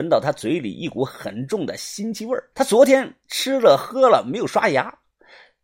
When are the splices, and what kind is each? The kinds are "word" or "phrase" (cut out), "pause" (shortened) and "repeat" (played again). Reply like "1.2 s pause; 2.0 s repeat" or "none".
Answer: 2.5 s pause